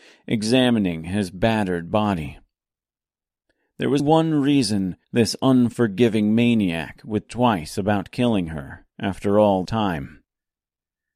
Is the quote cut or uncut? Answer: cut